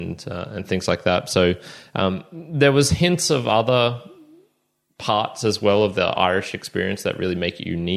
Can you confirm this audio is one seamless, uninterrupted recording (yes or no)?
yes